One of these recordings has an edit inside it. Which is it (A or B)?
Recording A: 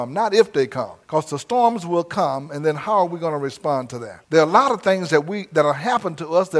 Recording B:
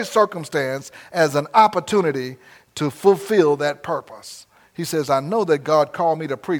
A